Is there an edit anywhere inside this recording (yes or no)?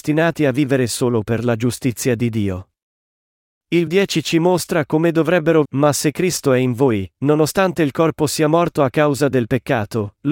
yes